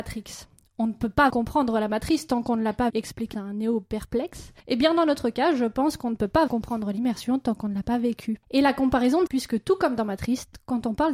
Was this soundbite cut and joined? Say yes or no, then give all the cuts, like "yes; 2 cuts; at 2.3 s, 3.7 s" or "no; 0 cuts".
yes; 7 cuts; at 1.3 s, 2.9 s, 3.3 s, 4.6 s, 6.5 s, 8.4 s, 9.3 s